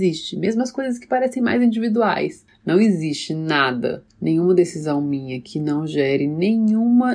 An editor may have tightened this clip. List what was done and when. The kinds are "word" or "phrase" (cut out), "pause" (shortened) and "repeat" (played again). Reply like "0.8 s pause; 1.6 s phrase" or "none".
4.1 s pause